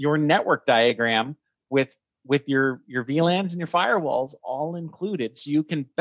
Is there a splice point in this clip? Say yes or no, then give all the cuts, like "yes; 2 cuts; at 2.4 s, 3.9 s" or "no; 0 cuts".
no; 0 cuts